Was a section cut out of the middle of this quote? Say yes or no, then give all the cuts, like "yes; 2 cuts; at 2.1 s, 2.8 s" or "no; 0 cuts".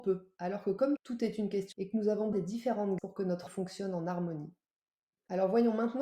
yes; 5 cuts; at 1.0 s, 1.7 s, 2.3 s, 3.0 s, 3.5 s